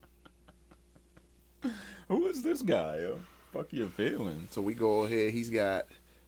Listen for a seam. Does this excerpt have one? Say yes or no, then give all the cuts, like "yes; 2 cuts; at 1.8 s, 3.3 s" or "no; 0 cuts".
no; 0 cuts